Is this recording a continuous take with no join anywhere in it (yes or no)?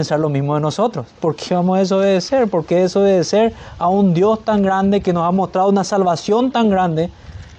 no